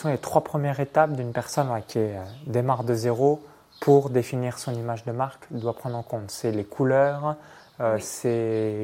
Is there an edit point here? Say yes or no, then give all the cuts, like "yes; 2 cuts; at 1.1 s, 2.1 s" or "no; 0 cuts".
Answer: no; 0 cuts